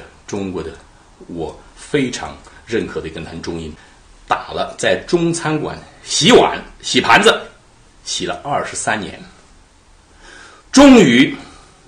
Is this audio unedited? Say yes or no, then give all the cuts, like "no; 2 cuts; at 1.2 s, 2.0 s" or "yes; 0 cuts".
no; 1 cut; at 10.6 s